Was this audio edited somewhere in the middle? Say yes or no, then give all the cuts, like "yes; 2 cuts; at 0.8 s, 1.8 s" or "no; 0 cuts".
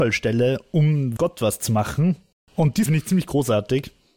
yes; 3 cuts; at 1.2 s, 2.3 s, 2.9 s